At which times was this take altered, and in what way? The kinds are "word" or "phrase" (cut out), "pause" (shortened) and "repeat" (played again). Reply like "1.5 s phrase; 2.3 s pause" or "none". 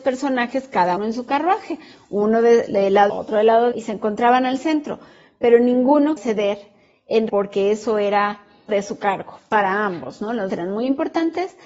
1.0 s word; 3.1 s word; 3.7 s word; 6.2 s word; 7.3 s word; 8.7 s word; 10.5 s word